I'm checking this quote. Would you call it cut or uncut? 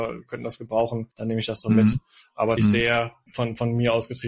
cut